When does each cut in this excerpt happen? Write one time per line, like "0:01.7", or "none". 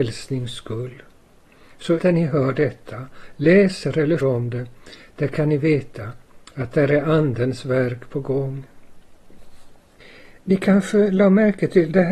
0:02.0
0:04.2